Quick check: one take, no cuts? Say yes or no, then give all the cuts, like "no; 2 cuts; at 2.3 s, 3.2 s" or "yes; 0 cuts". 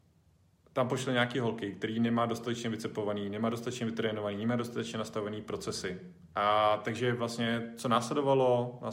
yes; 0 cuts